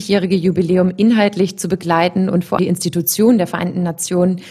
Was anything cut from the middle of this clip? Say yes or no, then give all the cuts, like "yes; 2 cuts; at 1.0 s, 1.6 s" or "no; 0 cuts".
yes; 1 cut; at 2.6 s